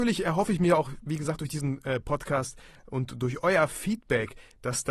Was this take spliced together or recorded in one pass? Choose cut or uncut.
uncut